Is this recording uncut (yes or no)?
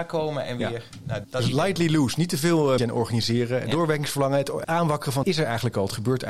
no